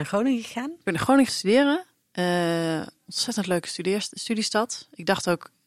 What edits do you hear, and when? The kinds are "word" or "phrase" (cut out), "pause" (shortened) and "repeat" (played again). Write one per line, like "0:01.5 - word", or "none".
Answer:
0:01.3 - phrase